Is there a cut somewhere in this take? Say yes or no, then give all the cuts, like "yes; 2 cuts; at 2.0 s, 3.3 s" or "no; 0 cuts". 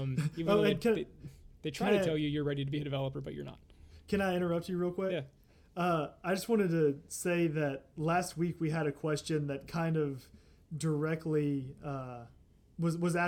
no; 0 cuts